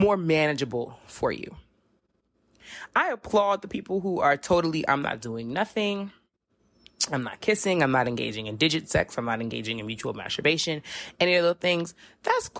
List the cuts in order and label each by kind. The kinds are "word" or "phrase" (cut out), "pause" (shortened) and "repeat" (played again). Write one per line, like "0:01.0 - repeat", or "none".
none